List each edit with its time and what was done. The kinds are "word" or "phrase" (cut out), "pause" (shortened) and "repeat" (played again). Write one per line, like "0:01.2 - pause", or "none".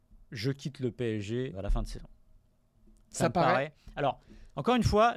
0:01.5 - word